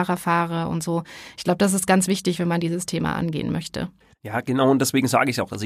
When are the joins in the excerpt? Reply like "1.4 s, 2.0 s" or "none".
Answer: 4.0 s